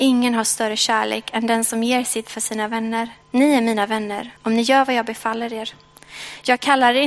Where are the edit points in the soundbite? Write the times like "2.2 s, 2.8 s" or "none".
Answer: 2.2 s, 3.2 s, 4.4 s